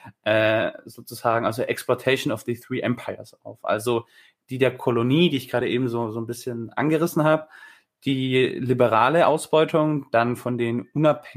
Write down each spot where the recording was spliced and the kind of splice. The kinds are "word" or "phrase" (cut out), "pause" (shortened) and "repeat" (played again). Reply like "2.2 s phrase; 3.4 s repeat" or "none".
none